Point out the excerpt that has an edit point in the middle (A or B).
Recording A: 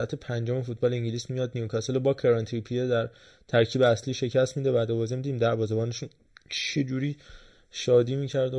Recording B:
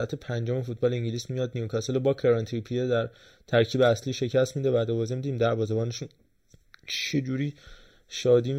A